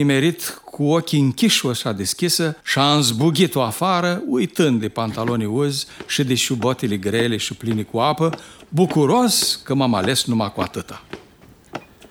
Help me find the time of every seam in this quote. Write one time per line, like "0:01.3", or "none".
0:02.6